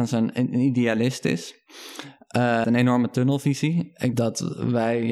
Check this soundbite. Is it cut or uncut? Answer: cut